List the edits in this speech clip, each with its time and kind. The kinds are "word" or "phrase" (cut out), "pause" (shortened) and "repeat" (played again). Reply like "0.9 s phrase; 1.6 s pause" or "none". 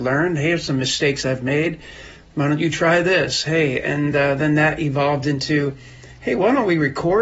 none